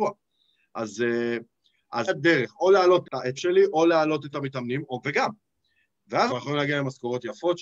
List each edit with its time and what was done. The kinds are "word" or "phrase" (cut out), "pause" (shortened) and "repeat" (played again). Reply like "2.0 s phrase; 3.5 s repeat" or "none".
2.1 s word; 3.0 s word; 3.4 s word; 4.3 s word; 5.0 s word; 6.3 s word